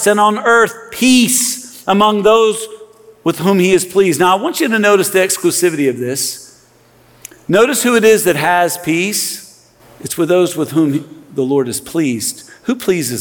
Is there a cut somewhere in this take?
yes; 1 cut; at 9.8 s

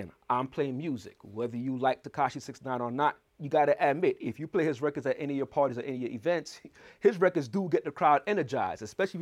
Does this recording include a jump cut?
no; 0 cuts

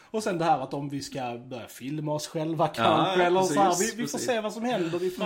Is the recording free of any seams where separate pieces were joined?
yes; 0 cuts

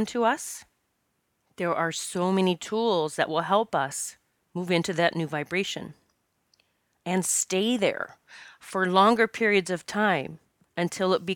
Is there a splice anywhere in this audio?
no; 0 cuts

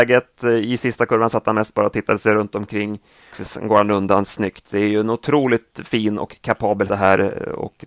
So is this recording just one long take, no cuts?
no; 2 cuts; at 3.3 s, 6.9 s

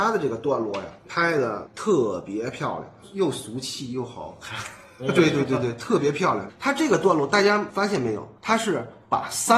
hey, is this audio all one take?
no; 1 cut; at 8.4 s

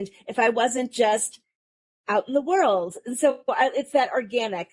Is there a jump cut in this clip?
no; 0 cuts

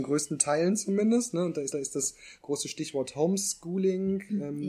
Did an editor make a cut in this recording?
yes; 1 cut; at 1.7 s

